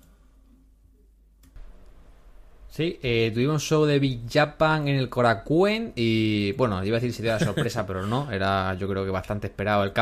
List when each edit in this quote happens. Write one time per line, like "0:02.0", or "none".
none